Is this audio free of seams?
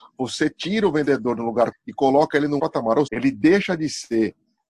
no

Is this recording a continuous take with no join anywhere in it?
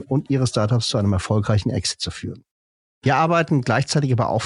yes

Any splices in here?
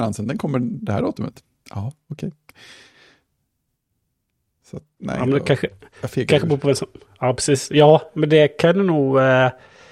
no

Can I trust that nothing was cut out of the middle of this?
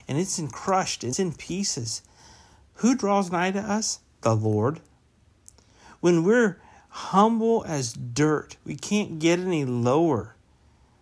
no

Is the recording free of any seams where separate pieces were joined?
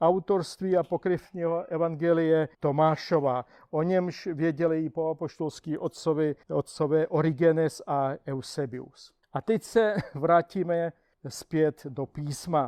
no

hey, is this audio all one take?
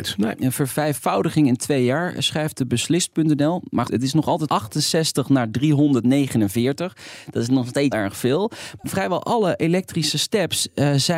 no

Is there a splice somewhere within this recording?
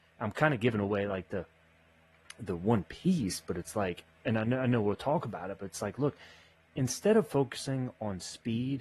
no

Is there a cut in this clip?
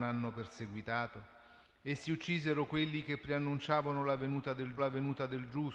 yes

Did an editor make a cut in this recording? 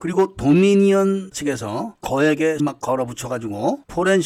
yes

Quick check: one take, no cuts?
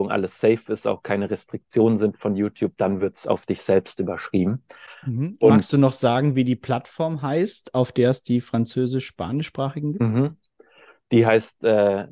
yes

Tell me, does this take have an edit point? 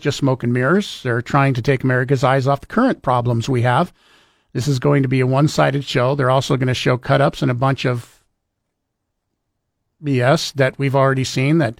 no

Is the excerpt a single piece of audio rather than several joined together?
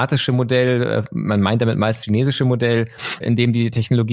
no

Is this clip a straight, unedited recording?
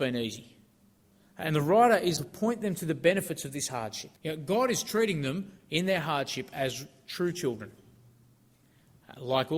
no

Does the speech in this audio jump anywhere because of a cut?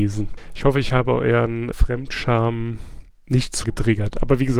yes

